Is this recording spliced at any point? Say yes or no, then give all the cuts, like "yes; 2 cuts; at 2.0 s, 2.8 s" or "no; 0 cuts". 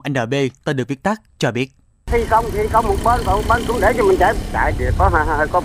no; 0 cuts